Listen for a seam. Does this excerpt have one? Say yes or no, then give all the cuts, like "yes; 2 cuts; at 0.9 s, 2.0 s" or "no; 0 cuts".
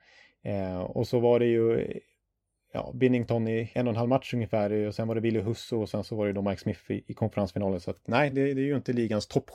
no; 0 cuts